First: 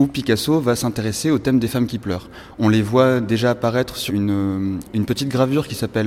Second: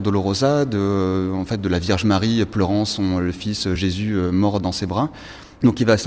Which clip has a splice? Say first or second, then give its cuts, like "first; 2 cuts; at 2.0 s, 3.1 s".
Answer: first; 1 cut; at 4.1 s